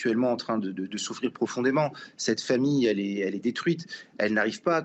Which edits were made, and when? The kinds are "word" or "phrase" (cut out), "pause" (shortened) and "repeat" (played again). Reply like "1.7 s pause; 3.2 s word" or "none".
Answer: none